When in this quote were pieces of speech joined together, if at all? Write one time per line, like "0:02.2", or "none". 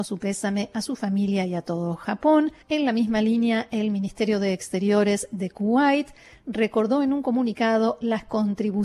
0:02.6